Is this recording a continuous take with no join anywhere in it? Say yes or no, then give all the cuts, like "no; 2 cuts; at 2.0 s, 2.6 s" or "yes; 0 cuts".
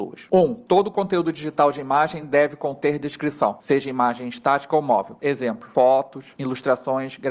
yes; 0 cuts